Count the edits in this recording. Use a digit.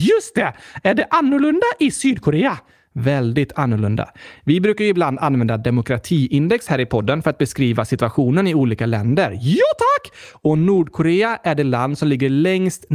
0